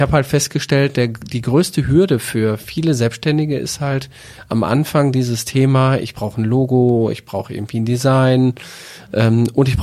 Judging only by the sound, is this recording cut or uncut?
uncut